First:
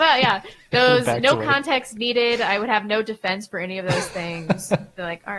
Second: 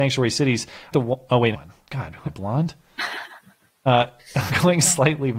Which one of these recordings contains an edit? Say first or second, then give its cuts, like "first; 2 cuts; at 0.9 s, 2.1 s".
second; 4 cuts; at 0.9 s, 1.5 s, 2.2 s, 4.5 s